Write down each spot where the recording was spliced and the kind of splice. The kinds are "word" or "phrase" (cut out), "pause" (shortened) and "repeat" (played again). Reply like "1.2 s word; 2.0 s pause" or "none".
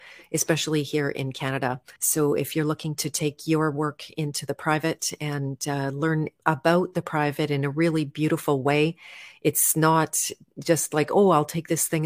2.0 s pause; 6.4 s pause